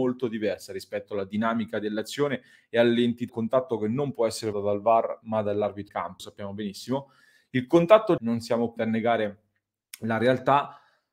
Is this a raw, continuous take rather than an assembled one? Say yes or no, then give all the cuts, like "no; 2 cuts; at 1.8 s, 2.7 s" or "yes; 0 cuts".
no; 6 cuts; at 3.3 s, 4.5 s, 5.9 s, 6.2 s, 8.2 s, 8.8 s